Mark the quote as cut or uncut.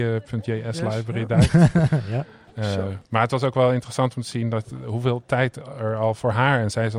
cut